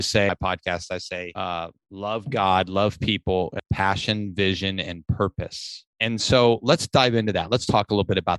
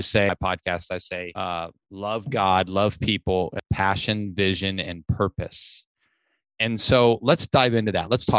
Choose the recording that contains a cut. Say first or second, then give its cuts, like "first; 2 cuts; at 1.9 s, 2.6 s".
first; 1 cut; at 5.9 s